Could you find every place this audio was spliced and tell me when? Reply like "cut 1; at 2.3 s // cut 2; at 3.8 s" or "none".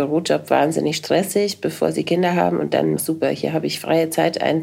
cut 1; at 3.0 s